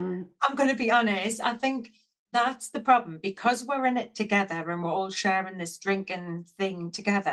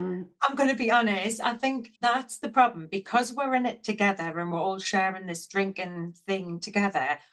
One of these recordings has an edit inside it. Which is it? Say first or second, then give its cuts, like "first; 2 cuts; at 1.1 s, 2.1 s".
second; 1 cut; at 2.0 s